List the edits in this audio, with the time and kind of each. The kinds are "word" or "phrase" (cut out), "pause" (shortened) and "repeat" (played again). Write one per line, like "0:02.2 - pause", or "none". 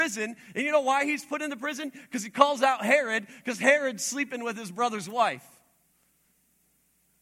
none